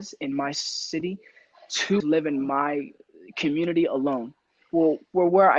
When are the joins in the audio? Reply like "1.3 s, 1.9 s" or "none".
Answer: 2.0 s

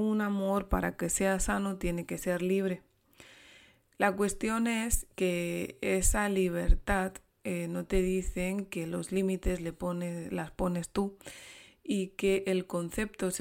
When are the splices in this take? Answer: none

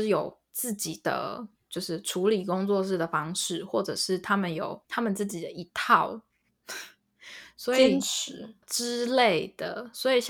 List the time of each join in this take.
4.8 s, 8.6 s

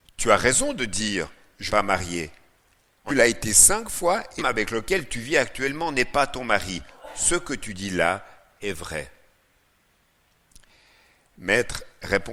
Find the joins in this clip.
1.7 s, 3.1 s, 4.4 s

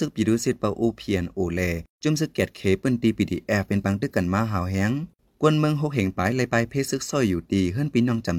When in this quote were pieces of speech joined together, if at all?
1.9 s

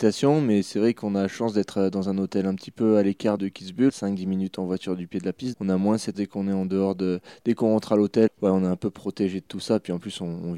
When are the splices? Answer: 3.4 s, 3.9 s, 5.5 s, 6.1 s, 8.3 s

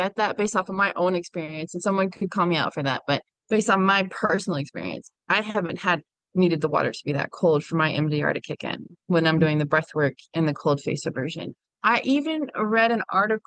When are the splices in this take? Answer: none

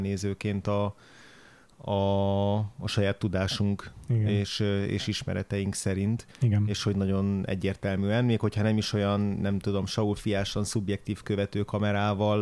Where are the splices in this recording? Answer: none

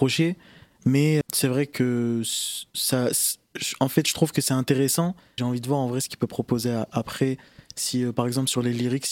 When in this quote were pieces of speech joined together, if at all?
1.2 s, 5.4 s

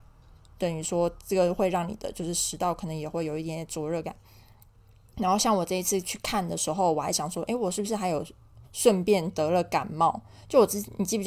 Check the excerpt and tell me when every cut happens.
8.6 s

